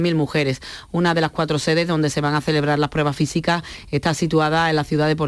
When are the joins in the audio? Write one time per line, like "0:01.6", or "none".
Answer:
none